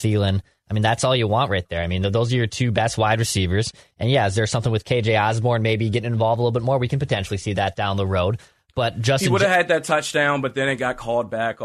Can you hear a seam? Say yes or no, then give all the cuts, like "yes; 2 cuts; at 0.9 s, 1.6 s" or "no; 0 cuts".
no; 0 cuts